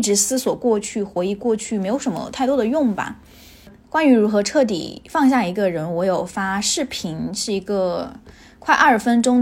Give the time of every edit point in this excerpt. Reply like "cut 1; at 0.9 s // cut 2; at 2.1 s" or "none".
none